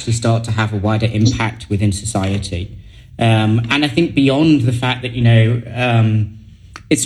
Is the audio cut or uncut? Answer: uncut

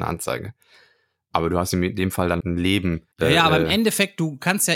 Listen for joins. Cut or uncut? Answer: cut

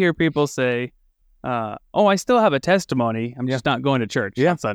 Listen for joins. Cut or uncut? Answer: uncut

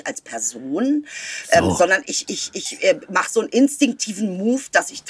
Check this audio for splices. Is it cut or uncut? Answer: uncut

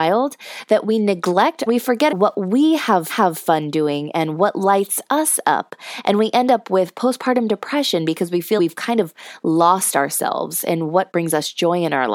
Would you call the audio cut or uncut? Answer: cut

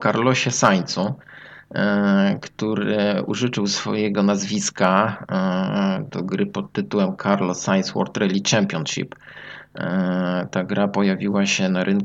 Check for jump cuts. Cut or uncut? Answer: uncut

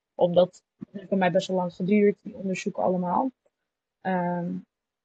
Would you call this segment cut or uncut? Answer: uncut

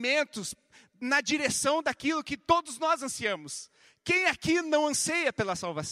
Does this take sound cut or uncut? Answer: uncut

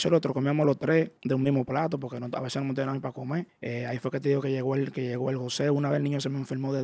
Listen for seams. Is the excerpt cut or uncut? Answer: cut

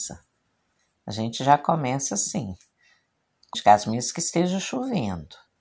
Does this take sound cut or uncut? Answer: cut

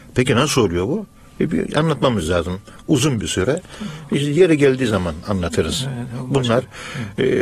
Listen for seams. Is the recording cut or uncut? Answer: uncut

